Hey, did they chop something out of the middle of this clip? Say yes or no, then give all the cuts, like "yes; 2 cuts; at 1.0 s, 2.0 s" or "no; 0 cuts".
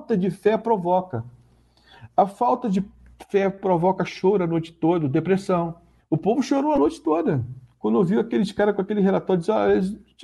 yes; 1 cut; at 6.0 s